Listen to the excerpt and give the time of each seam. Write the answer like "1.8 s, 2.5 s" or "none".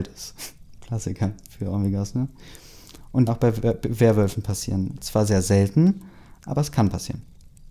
3.3 s